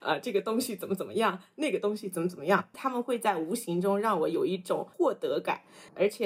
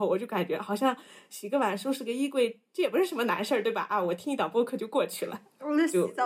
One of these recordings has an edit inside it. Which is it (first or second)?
first